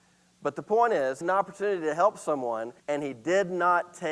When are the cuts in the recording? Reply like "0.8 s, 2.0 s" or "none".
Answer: 1.2 s, 2.8 s